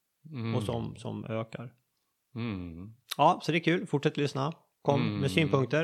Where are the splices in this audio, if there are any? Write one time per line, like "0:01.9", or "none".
none

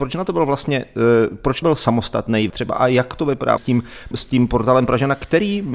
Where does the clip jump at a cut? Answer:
0:01.6
0:02.5
0:03.6
0:04.1

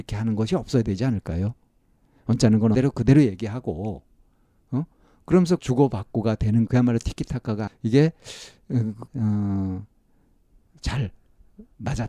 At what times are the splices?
0:02.7
0:05.6
0:06.7
0:07.7
0:09.1

